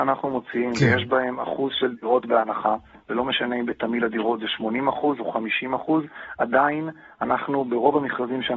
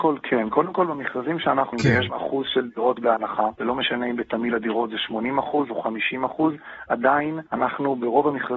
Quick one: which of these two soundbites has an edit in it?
second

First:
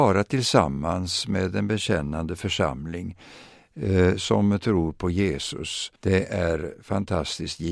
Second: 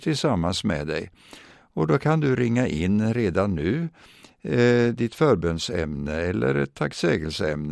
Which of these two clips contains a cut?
first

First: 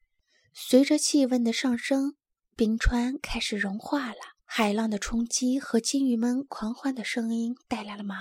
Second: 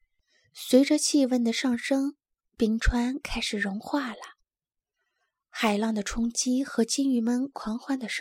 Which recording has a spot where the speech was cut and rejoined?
first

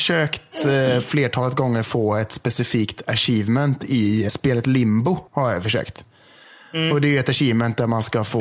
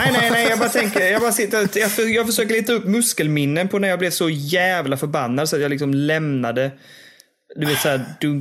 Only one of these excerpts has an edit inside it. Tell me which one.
first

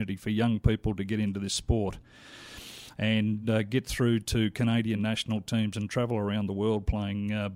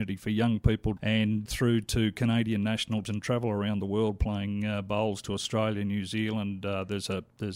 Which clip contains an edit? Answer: second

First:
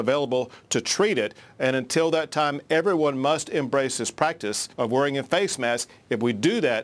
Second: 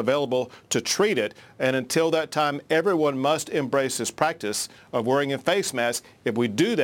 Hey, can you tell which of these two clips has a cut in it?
first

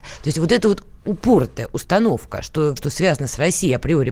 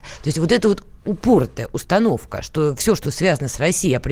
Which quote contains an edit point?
first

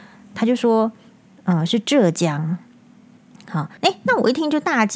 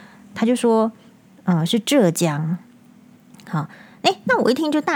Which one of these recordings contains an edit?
first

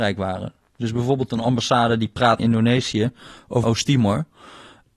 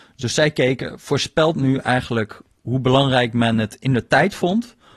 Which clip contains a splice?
first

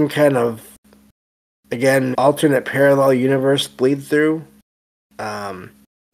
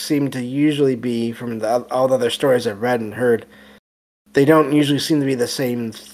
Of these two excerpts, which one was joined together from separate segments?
first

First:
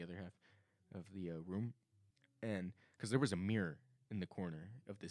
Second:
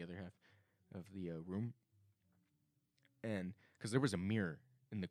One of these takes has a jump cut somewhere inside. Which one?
first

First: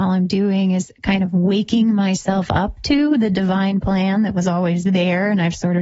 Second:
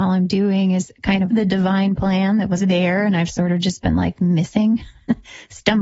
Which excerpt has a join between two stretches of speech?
second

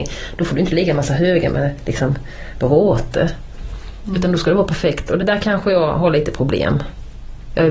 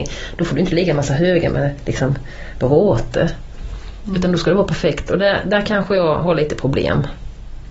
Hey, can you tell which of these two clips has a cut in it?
first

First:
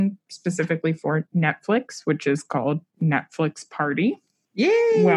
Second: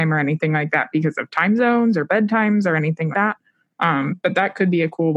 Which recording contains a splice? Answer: second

